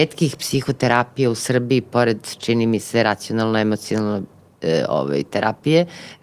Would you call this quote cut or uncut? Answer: uncut